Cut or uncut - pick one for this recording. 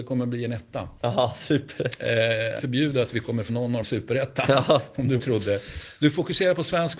cut